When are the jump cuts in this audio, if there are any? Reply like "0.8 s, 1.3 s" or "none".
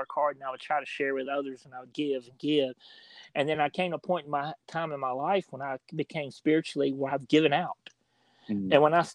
none